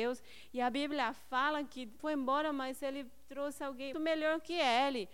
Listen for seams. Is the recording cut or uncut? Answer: cut